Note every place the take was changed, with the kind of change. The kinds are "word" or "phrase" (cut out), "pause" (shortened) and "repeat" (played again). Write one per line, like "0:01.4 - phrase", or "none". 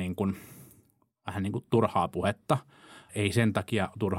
0:03.1 - word